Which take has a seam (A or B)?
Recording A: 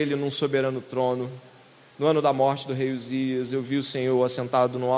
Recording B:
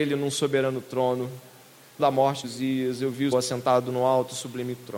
B